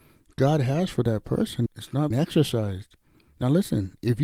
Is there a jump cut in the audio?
yes; 3 cuts; at 1.7 s, 2.1 s, 3.1 s

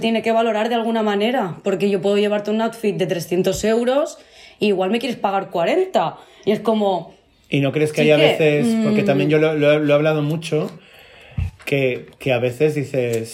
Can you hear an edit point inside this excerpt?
no; 0 cuts

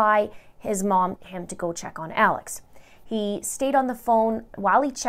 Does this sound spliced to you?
yes; 1 cut; at 1.2 s

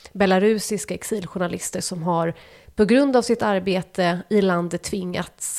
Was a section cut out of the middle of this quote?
no; 0 cuts

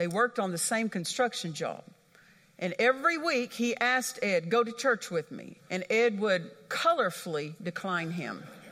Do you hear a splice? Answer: no; 0 cuts

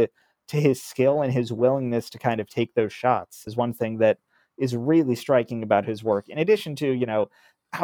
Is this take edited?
yes; 1 cut; at 3.5 s

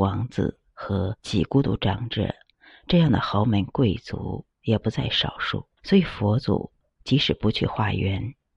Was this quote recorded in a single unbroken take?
no; 3 cuts; at 1.2 s, 4.5 s, 5.8 s

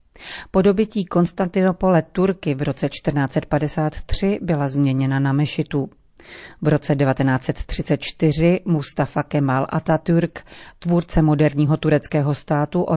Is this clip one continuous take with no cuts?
yes; 0 cuts

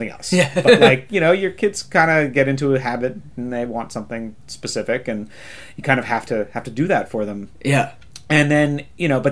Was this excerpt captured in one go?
yes; 0 cuts

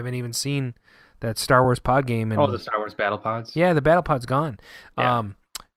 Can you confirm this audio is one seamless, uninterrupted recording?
yes; 0 cuts

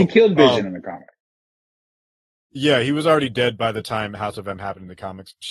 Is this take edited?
no; 0 cuts

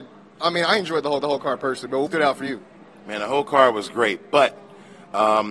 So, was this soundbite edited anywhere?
yes; 2 cuts; at 1.2 s, 2.1 s

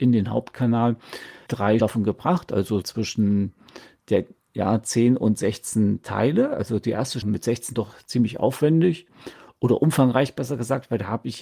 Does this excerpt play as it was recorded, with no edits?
no; 5 cuts; at 1.5 s, 1.8 s, 2.8 s, 7.2 s, 7.7 s

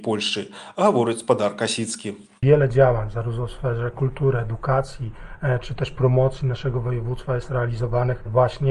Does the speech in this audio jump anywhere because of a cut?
no; 0 cuts

